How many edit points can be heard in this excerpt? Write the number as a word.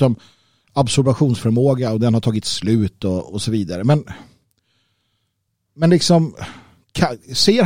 zero